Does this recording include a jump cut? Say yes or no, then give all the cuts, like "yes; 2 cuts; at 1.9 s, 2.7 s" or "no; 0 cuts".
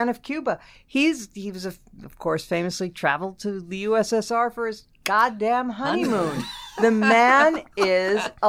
no; 0 cuts